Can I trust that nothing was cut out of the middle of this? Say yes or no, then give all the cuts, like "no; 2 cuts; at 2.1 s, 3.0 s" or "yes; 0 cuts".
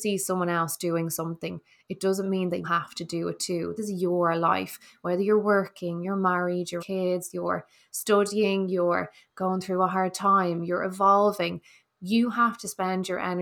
no; 3 cuts; at 2.6 s, 3.8 s, 6.8 s